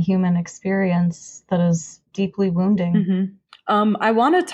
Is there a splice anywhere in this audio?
yes; 1 cut; at 2.1 s

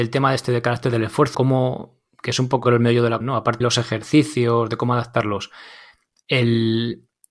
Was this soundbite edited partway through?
yes; 4 cuts; at 1.3 s, 2.6 s, 3.2 s, 3.6 s

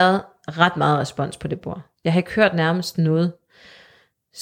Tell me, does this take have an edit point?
no; 0 cuts

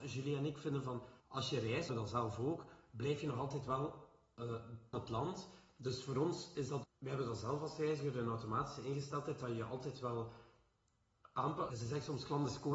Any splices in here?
yes; 5 cuts; at 1.2 s, 1.9 s, 4.9 s, 6.8 s, 11.7 s

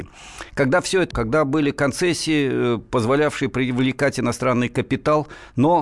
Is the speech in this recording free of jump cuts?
no; 1 cut; at 1.1 s

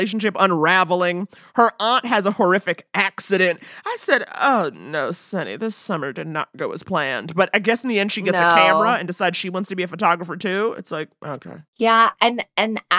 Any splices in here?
no; 0 cuts

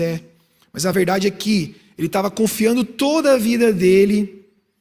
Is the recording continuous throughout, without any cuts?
yes; 0 cuts

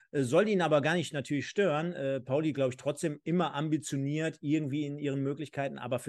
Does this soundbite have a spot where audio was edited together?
no; 0 cuts

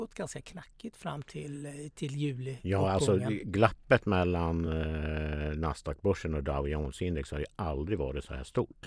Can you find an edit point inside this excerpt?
no; 0 cuts

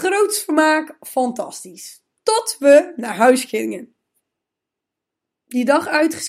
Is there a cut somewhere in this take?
no; 0 cuts

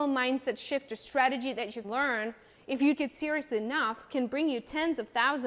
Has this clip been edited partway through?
yes; 2 cuts; at 1.8 s, 3.0 s

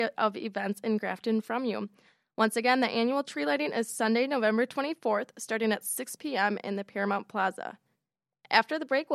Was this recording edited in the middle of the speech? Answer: no; 0 cuts

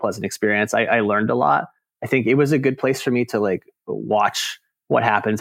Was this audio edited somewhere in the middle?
no; 0 cuts

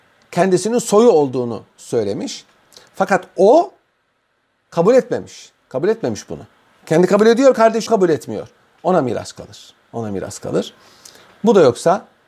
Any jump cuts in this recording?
yes; 2 cuts; at 5.6 s, 7.9 s

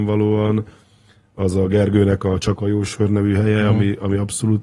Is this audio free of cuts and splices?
yes; 0 cuts

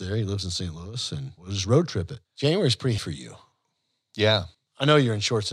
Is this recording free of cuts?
no; 4 cuts; at 1.4 s, 2.3 s, 3.0 s, 4.5 s

